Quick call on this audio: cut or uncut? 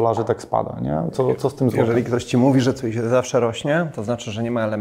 uncut